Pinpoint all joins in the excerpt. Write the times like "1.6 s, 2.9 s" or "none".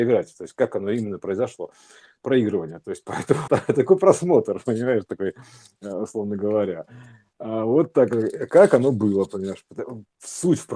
3.5 s